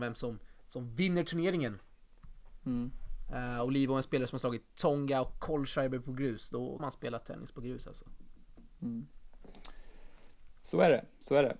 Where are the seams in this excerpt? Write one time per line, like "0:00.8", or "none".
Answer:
0:06.8